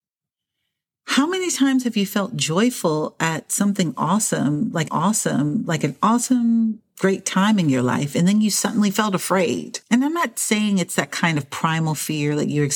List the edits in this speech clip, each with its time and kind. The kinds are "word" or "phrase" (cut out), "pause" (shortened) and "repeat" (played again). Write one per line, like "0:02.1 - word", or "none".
0:04.9 - repeat
0:09.8 - pause